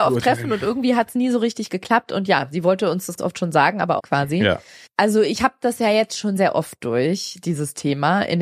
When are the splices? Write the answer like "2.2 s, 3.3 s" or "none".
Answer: 3.2 s, 4.0 s, 4.9 s, 6.4 s